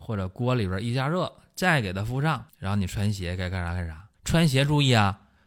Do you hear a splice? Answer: yes; 2 cuts; at 2.5 s, 4.1 s

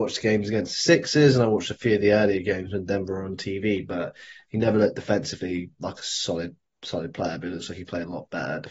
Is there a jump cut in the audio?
no; 0 cuts

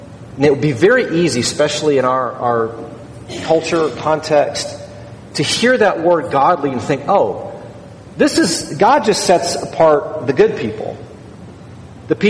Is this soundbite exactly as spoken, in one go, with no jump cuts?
yes; 0 cuts

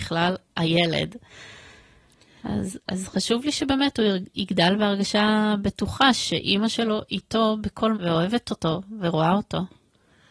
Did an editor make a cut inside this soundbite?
yes; 1 cut; at 7.9 s

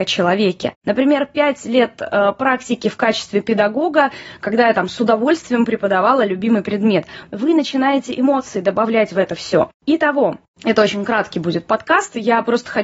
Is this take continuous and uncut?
yes; 0 cuts

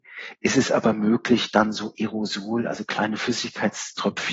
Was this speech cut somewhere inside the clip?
no; 0 cuts

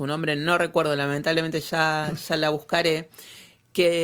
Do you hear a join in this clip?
no; 0 cuts

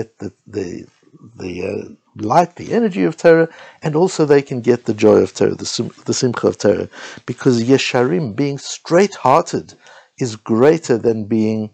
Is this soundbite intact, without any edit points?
yes; 0 cuts

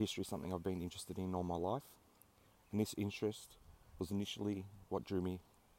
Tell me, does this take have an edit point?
no; 0 cuts

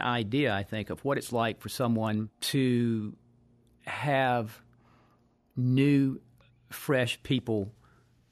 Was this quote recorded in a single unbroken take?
no; 1 cut; at 2.3 s

